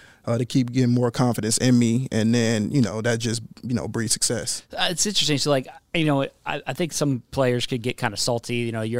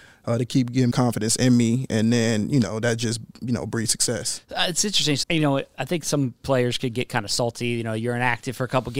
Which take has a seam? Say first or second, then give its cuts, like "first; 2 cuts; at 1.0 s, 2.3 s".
second; 3 cuts; at 0.9 s, 5.2 s, 5.7 s